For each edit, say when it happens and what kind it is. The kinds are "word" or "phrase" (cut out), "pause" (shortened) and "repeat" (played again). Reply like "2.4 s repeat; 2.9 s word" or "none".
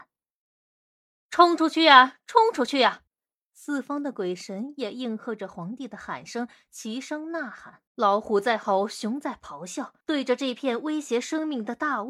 3.1 s pause; 7.9 s pause; 10.0 s pause